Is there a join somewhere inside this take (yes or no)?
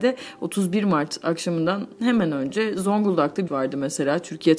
yes